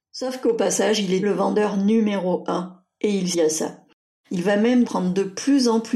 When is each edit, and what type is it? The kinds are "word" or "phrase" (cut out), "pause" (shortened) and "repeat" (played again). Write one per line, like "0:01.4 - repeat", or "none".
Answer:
0:01.2 - word
0:03.3 - word
0:04.9 - word